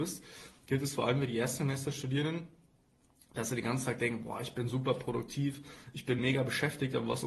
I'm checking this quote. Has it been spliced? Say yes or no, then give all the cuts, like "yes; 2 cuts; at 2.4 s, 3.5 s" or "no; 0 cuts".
no; 0 cuts